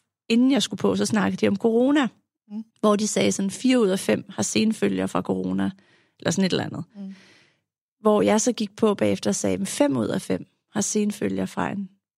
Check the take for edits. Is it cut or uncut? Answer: cut